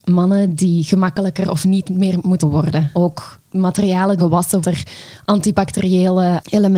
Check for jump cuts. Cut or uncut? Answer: cut